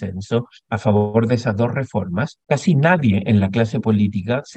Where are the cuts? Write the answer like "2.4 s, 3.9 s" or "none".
2.4 s